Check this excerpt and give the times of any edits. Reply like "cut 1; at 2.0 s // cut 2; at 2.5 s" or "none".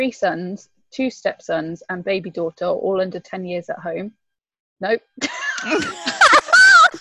none